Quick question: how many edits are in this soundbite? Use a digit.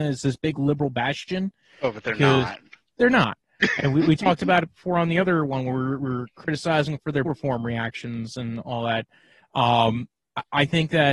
1